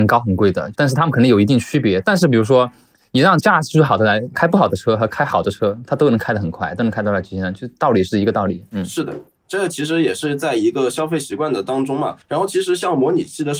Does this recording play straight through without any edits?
no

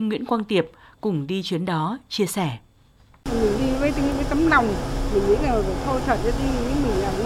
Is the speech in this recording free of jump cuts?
yes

